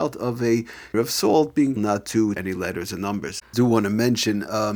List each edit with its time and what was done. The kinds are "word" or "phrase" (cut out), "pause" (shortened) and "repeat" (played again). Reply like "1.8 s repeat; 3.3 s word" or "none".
0.9 s word; 1.8 s word; 2.4 s word; 3.5 s word